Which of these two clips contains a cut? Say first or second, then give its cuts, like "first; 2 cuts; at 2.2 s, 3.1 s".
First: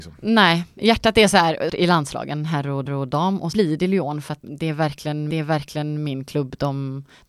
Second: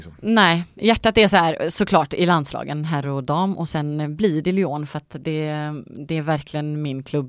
first; 5 cuts; at 1.7 s, 2.9 s, 3.5 s, 4.4 s, 5.3 s